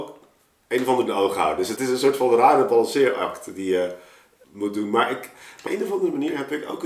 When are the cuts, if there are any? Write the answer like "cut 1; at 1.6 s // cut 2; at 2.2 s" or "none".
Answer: cut 1; at 1.1 s // cut 2; at 1.8 s // cut 3; at 4.4 s // cut 4; at 5.7 s